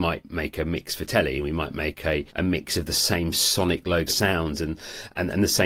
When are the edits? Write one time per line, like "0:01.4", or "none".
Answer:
0:02.3
0:04.1